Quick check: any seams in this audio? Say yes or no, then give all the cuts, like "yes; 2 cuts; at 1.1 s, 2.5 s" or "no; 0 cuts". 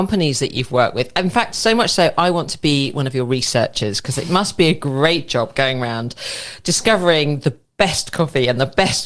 no; 0 cuts